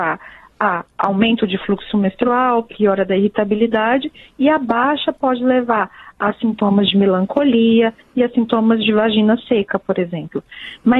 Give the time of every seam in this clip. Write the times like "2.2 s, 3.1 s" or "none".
none